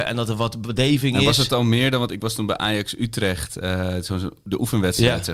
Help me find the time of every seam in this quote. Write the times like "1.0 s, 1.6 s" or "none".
none